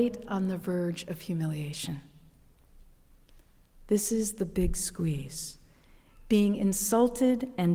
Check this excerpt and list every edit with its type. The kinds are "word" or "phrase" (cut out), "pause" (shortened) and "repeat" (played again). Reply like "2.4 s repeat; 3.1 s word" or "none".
none